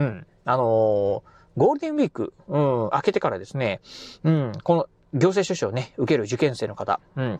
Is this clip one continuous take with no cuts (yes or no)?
yes